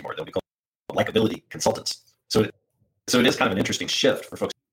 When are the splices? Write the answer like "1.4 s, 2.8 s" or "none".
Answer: 2.2 s